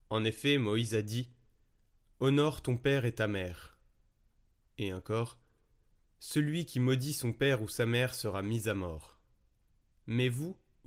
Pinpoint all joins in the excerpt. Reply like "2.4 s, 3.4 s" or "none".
none